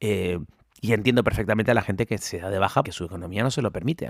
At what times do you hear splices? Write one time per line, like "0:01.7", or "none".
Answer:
0:02.2
0:02.8